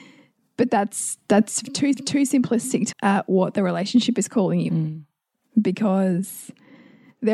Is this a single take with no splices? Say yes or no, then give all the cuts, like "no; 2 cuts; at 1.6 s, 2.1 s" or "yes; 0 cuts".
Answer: no; 3 cuts; at 1.9 s, 2.9 s, 4.7 s